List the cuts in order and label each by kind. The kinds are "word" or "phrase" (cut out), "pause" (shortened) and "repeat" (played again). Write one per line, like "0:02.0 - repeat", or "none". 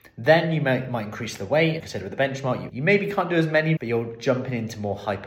0:01.8 - word
0:02.7 - phrase
0:03.8 - phrase